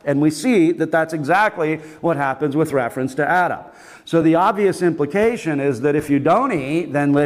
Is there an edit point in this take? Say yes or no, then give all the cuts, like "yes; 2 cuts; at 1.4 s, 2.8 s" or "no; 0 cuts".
no; 0 cuts